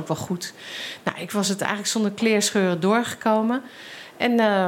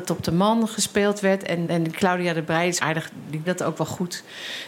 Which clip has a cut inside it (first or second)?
second